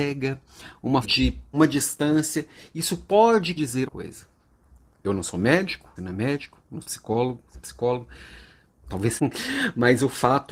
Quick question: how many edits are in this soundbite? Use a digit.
8